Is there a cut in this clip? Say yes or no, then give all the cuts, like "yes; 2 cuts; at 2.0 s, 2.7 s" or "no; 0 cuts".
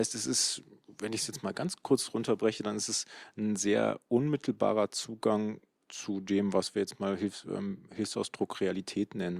no; 0 cuts